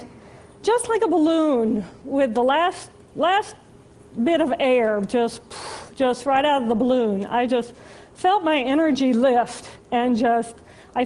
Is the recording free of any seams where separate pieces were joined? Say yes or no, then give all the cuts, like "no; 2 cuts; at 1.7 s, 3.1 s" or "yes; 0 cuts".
yes; 0 cuts